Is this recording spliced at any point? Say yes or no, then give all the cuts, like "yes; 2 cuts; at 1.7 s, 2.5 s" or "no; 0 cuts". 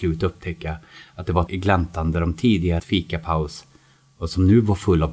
yes; 2 cuts; at 1.5 s, 2.8 s